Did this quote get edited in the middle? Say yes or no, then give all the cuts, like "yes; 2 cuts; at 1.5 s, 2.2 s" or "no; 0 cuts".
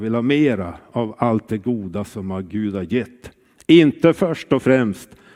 no; 0 cuts